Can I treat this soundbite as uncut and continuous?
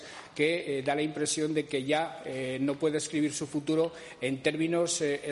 yes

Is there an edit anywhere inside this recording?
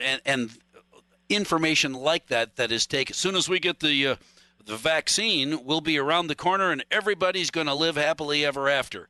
no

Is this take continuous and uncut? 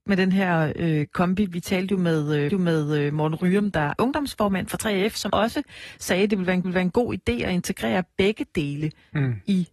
no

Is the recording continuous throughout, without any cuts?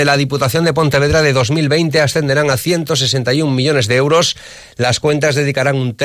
yes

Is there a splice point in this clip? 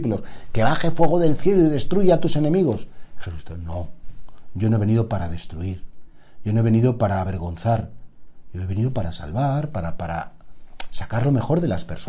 no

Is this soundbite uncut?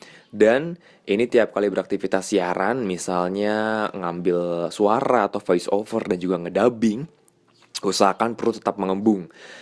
yes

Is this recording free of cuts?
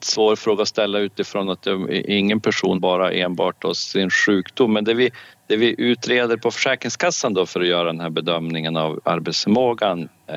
no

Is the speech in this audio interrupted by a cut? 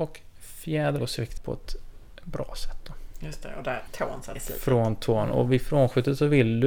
yes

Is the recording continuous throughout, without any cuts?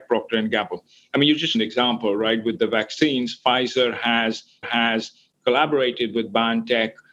no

